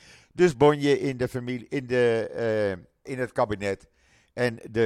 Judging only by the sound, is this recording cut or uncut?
cut